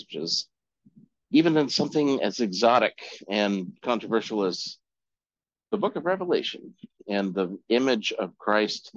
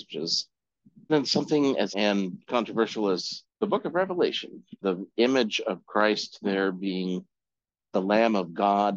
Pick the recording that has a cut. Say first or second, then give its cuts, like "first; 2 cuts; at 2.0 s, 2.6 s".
second; 4 cuts; at 1.1 s, 1.9 s, 3.5 s, 4.8 s